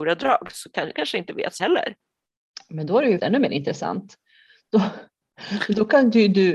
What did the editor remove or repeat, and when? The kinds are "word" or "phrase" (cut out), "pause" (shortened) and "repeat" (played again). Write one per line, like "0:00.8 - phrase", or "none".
0:00.9 - word
0:01.6 - word
0:03.2 - word